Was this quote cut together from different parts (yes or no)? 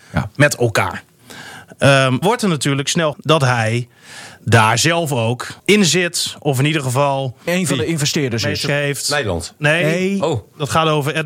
yes